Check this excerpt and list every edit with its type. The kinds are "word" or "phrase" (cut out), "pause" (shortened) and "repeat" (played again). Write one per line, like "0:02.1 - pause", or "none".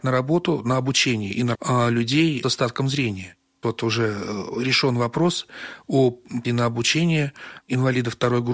0:01.5 - word
0:02.4 - word
0:03.6 - word
0:06.4 - word